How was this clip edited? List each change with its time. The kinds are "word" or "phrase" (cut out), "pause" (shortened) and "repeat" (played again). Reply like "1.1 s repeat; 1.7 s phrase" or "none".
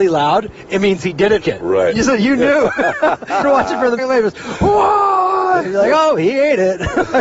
1.4 s word; 3.4 s word; 4.0 s word